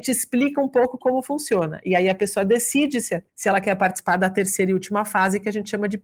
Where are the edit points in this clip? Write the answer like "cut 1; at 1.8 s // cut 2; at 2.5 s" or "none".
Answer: cut 1; at 3.3 s